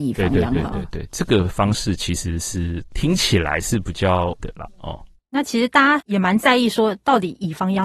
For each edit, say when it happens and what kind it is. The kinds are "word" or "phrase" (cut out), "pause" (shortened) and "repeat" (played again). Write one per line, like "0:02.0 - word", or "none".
0:04.4 - word